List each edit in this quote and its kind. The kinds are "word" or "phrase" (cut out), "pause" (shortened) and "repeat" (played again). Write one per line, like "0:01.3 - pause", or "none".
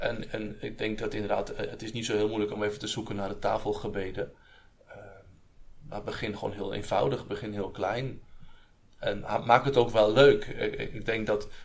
none